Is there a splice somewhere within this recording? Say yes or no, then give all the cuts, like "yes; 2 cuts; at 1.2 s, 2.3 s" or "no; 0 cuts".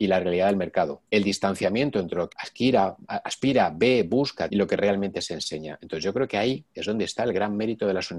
yes; 3 cuts; at 1.1 s, 2.3 s, 4.5 s